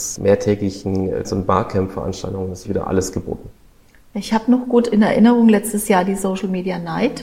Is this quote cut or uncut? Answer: cut